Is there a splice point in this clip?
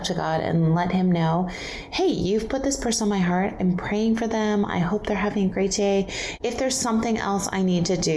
no; 0 cuts

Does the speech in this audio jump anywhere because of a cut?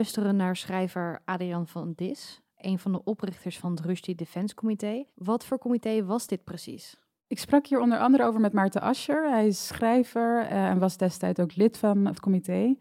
no; 0 cuts

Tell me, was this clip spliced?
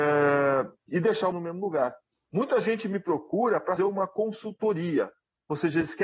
yes; 2 cuts; at 1.3 s, 3.8 s

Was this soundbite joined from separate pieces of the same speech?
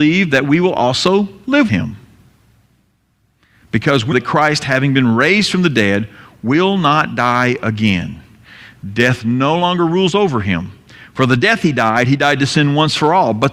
yes; 2 cuts; at 1.7 s, 4.1 s

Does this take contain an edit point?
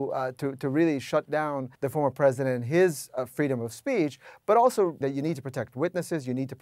yes; 2 cuts; at 1.7 s, 5.0 s

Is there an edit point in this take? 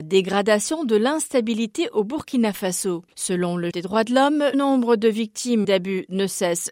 yes; 3 cuts; at 3.7 s, 4.5 s, 5.6 s

